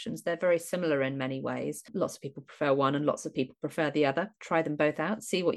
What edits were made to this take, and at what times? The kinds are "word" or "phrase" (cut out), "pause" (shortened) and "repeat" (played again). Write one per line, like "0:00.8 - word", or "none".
none